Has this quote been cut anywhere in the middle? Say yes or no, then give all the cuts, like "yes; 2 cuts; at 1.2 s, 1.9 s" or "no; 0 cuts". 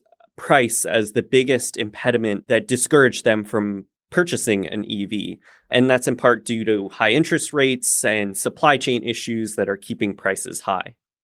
no; 0 cuts